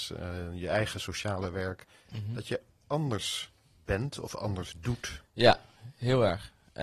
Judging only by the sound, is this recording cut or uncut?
uncut